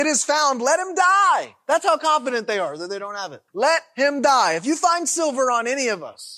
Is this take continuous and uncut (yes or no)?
no